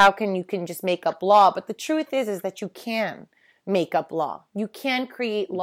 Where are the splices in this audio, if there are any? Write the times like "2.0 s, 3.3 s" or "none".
none

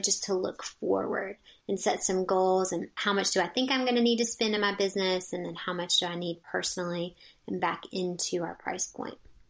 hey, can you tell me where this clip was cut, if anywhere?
none

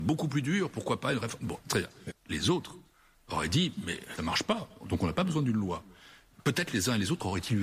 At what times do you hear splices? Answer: 4.2 s

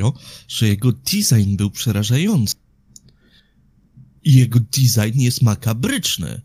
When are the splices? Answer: none

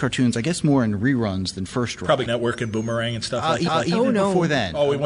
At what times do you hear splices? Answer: 2.3 s, 3.7 s

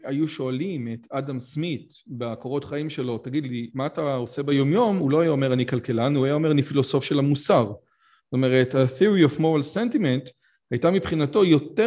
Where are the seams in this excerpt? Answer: none

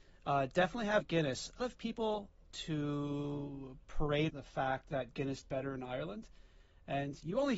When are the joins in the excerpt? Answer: 1.0 s, 1.6 s, 2.4 s, 4.3 s, 5.4 s

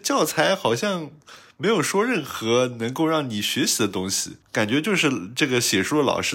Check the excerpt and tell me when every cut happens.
4.4 s

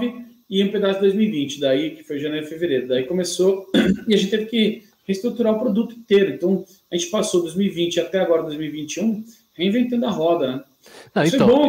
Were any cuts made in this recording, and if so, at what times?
none

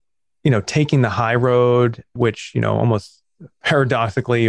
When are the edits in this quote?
none

